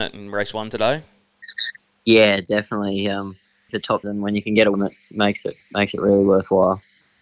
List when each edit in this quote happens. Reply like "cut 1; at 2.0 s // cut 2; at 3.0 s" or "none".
cut 1; at 3.7 s // cut 2; at 4.0 s // cut 3; at 4.7 s